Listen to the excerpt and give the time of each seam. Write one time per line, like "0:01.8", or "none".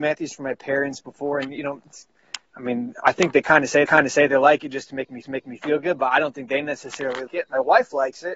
0:02.5
0:03.8
0:05.2
0:07.3